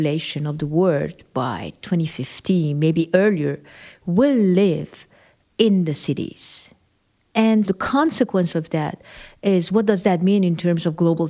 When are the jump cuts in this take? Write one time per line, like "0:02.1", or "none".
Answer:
0:07.6